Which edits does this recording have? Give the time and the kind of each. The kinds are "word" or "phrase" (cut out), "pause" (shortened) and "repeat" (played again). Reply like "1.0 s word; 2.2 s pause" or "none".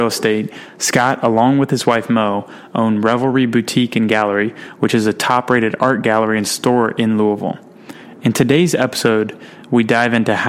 none